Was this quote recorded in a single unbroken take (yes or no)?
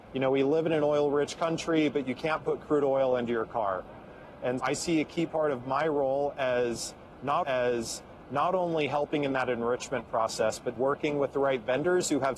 no